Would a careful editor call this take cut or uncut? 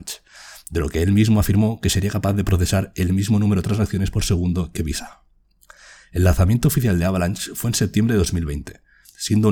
uncut